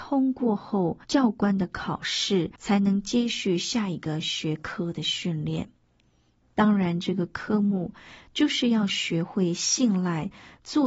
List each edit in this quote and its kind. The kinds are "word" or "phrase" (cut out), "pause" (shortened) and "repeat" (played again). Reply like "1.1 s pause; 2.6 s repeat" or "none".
1.0 s pause; 2.6 s pause